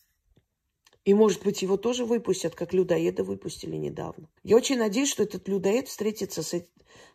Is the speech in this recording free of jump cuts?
no; 1 cut; at 4.4 s

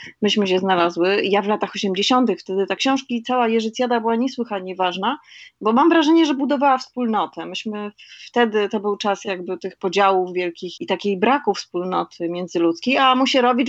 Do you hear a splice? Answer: yes; 2 cuts; at 2.8 s, 10.8 s

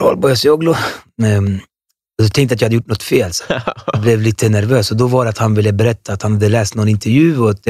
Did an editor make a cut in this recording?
no; 0 cuts

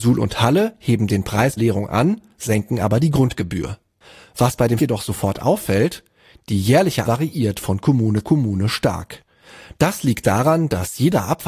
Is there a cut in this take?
yes; 4 cuts; at 1.6 s, 4.8 s, 7.0 s, 8.2 s

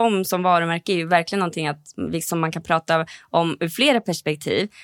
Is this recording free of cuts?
yes; 0 cuts

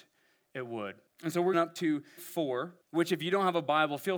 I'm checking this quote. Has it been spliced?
yes; 4 cuts; at 1.1 s, 1.5 s, 2.2 s, 2.8 s

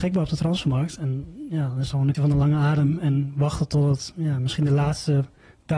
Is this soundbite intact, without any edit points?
no; 1 cut; at 2.1 s

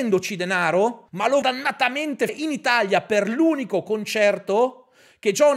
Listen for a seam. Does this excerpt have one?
yes; 3 cuts; at 1.1 s, 1.4 s, 2.3 s

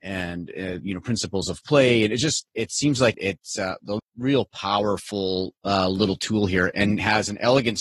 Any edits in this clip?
yes; 2 cuts; at 4.0 s, 5.6 s

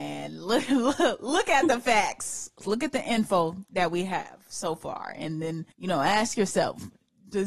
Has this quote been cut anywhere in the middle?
yes; 1 cut; at 5.7 s

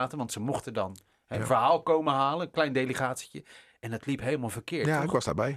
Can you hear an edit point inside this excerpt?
no; 0 cuts

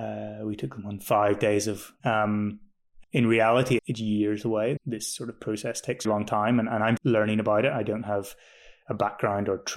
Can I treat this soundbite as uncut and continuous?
no; 6 cuts; at 2.0 s, 3.0 s, 3.8 s, 4.8 s, 6.0 s, 7.0 s

